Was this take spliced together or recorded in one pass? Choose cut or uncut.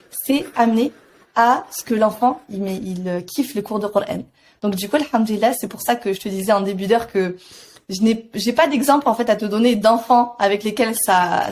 uncut